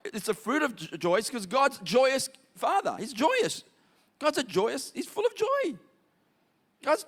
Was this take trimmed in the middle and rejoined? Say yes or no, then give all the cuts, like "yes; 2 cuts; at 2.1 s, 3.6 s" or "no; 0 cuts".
no; 0 cuts